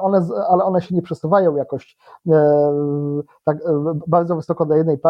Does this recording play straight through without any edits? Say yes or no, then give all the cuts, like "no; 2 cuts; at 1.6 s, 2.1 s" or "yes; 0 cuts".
yes; 0 cuts